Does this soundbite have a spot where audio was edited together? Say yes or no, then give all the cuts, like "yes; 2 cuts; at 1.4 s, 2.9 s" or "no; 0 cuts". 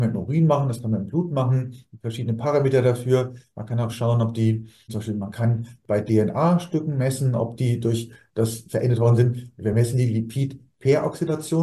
no; 0 cuts